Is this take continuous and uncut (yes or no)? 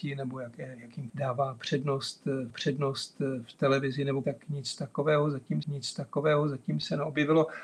no